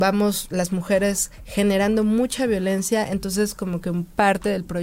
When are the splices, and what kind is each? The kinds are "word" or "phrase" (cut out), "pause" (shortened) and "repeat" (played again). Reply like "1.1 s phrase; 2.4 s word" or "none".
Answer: none